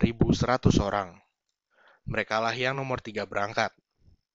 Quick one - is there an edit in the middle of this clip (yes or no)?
no